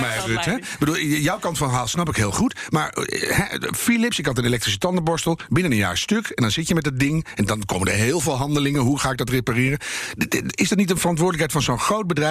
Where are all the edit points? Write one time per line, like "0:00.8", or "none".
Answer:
none